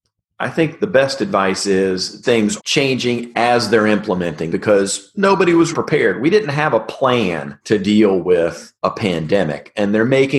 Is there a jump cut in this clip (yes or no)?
yes